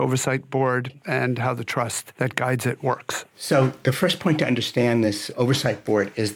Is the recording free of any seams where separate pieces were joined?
yes; 0 cuts

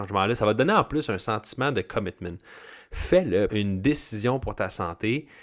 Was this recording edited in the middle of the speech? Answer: yes; 1 cut; at 3.5 s

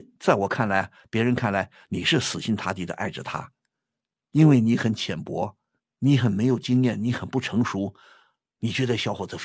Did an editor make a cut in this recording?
yes; 1 cut; at 5.8 s

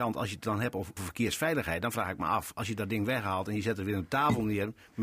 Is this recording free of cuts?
no; 1 cut; at 1.0 s

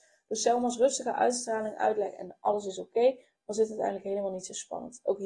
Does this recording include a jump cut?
no; 0 cuts

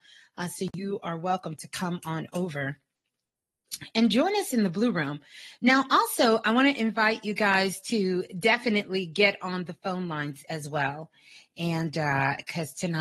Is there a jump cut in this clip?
no; 0 cuts

